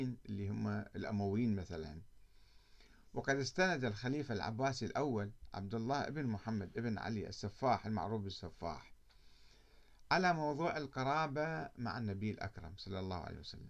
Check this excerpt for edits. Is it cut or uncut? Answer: uncut